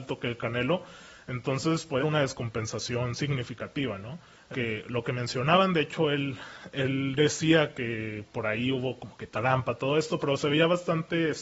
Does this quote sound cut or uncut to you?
cut